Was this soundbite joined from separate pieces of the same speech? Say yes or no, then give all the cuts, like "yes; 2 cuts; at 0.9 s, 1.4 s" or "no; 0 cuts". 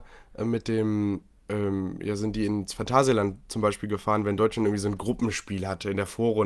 no; 0 cuts